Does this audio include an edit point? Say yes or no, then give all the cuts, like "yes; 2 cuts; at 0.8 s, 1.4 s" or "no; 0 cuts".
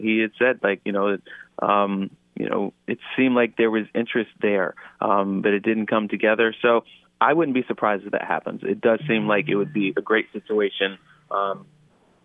no; 0 cuts